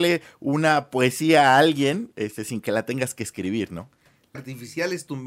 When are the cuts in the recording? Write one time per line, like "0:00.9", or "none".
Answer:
0:04.3